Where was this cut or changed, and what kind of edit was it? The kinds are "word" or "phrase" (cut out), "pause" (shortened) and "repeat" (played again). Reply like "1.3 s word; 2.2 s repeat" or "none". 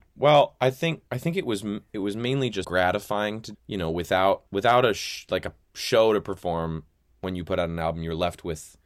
1.1 s pause; 2.6 s word; 3.5 s phrase; 4.5 s pause